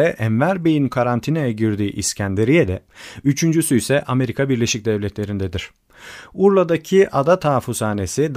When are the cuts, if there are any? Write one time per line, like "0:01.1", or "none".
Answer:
none